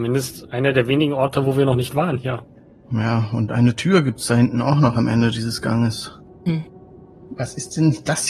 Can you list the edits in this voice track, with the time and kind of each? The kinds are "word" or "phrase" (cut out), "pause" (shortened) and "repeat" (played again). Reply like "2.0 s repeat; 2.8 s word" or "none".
none